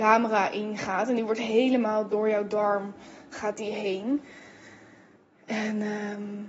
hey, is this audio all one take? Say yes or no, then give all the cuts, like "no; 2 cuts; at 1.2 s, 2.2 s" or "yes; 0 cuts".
yes; 0 cuts